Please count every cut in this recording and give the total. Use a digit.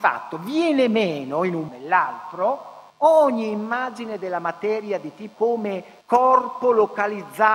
4